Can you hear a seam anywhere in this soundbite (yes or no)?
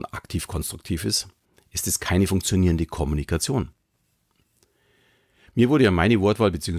no